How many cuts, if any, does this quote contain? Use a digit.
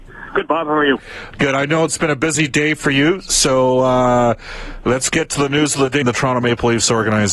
1